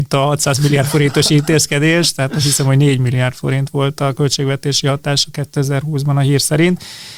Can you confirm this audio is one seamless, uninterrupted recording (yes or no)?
yes